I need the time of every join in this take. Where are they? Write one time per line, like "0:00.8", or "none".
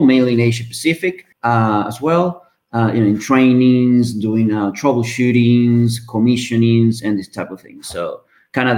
0:01.3

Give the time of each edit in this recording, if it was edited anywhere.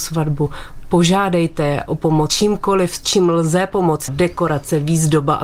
0:02.3
0:03.0
0:04.1

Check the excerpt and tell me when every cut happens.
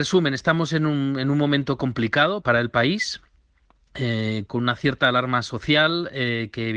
0:02.4
0:04.5

